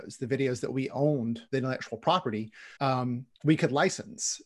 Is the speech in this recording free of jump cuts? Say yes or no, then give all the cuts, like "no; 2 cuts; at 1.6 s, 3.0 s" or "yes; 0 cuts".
no; 2 cuts; at 1.5 s, 2.8 s